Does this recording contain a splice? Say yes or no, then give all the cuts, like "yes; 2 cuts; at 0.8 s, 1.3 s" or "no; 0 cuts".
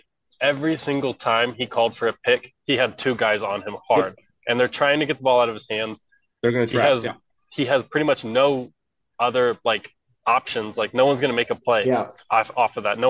no; 0 cuts